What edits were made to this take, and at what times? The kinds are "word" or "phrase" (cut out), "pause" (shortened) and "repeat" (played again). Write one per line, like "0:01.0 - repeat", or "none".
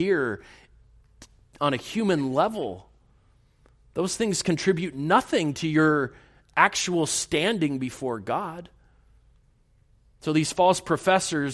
none